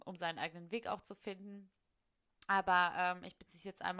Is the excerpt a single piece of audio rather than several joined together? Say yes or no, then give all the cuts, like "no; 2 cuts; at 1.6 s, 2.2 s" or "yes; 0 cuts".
yes; 0 cuts